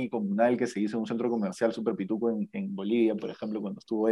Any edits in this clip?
no; 0 cuts

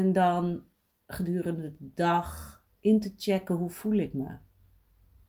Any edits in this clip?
no; 0 cuts

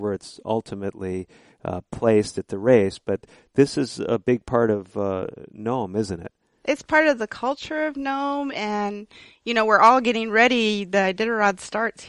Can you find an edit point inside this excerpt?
no; 0 cuts

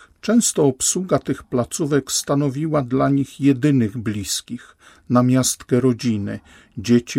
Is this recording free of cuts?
yes; 0 cuts

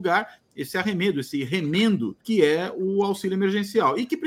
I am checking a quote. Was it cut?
yes; 1 cut; at 2.2 s

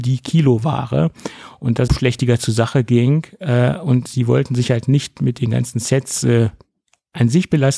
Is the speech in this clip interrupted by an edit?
yes; 1 cut; at 1.9 s

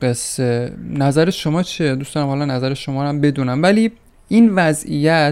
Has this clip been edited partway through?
no; 0 cuts

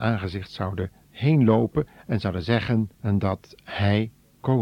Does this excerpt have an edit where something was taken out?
yes; 2 cuts; at 1.0 s, 2.9 s

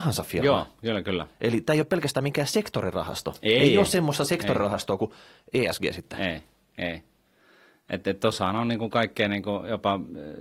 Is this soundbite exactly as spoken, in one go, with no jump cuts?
yes; 0 cuts

